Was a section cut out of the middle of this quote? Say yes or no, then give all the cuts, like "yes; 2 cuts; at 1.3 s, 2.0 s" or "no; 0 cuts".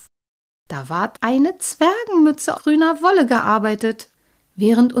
yes; 2 cuts; at 1.1 s, 2.5 s